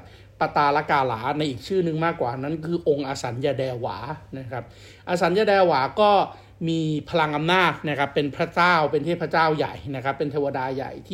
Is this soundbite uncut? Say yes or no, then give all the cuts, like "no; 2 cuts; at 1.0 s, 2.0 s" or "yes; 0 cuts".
yes; 0 cuts